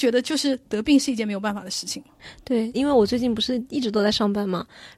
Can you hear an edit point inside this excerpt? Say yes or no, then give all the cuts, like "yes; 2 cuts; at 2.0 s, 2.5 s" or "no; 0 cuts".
yes; 1 cut; at 2.7 s